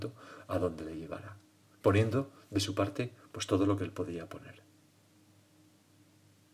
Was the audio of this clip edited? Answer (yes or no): no